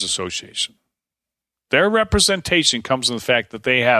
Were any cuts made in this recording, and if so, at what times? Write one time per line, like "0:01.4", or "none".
none